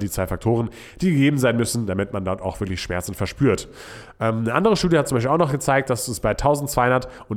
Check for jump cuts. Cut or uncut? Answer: uncut